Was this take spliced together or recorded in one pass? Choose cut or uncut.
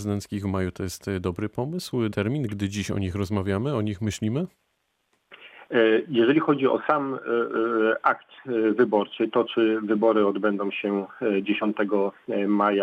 cut